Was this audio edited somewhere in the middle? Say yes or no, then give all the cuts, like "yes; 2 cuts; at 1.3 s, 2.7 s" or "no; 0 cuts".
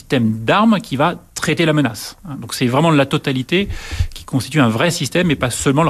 no; 0 cuts